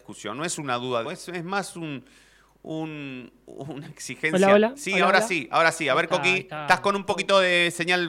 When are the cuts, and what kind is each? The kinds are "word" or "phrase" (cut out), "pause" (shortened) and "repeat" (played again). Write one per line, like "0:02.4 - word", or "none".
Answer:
0:01.0 - phrase